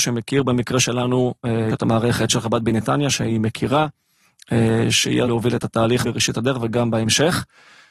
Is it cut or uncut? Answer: cut